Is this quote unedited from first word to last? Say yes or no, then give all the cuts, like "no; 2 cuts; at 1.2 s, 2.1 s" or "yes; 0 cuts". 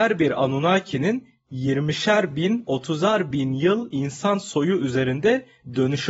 yes; 0 cuts